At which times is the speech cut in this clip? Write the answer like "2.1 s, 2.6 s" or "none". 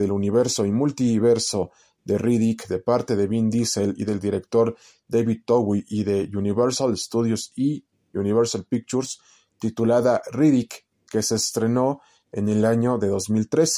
none